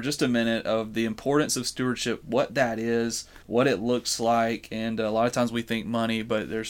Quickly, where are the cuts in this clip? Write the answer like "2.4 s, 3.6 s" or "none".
3.4 s